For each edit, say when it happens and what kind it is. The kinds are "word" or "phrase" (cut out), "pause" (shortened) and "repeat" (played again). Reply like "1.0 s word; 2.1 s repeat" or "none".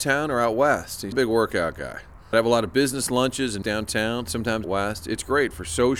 1.1 s phrase; 2.3 s word; 3.6 s word; 4.6 s word